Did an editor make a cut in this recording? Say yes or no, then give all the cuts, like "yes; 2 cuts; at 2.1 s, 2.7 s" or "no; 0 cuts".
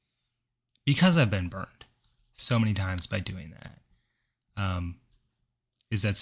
no; 0 cuts